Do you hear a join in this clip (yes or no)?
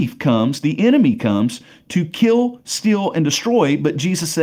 no